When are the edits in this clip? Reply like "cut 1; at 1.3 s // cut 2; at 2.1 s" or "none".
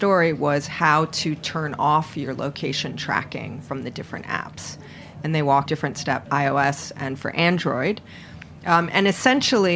cut 1; at 5.7 s // cut 2; at 6.3 s